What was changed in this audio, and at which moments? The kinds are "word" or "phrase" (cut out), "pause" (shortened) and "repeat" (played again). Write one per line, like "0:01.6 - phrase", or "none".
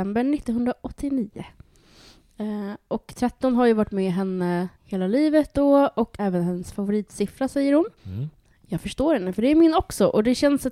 0:04.8 - pause
0:06.2 - phrase
0:08.0 - pause